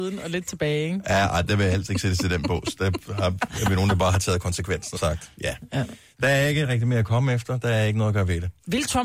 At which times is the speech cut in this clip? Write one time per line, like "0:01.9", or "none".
0:05.0